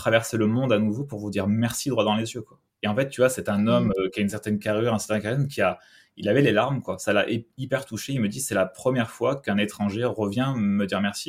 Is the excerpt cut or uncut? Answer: uncut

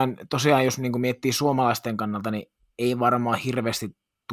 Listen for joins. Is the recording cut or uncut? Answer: uncut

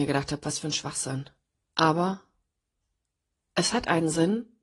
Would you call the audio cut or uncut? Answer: cut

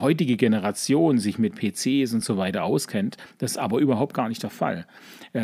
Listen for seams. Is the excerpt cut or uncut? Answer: uncut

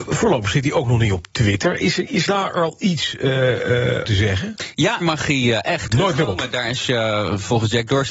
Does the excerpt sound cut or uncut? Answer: cut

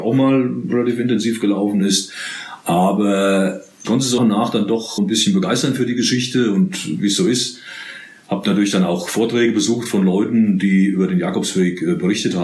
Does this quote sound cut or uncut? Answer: cut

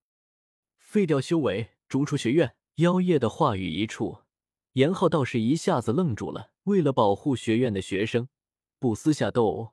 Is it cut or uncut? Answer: cut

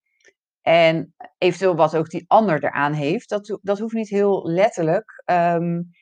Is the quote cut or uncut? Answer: uncut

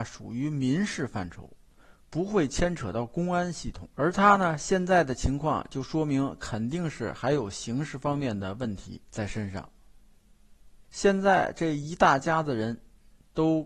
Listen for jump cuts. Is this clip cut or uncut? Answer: cut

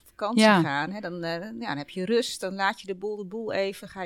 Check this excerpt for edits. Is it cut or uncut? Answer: uncut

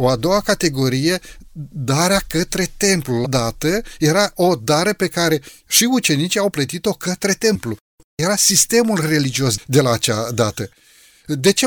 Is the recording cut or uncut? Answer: cut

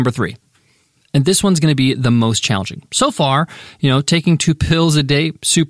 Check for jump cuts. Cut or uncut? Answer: uncut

